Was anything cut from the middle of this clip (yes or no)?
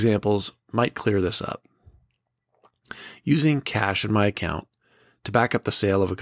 no